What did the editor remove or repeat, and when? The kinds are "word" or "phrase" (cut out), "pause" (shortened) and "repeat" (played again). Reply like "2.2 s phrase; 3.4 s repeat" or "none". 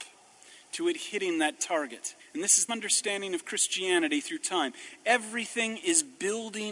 2.2 s pause; 2.7 s word